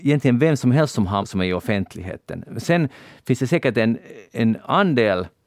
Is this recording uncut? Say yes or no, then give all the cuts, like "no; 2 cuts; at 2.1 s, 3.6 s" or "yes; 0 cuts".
no; 1 cut; at 1.2 s